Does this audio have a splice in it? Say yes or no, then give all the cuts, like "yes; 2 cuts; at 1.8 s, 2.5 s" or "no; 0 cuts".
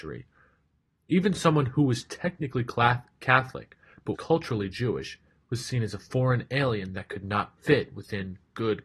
yes; 1 cut; at 4.1 s